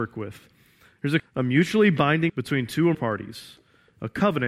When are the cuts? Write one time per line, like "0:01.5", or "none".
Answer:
0:01.2
0:02.3
0:02.9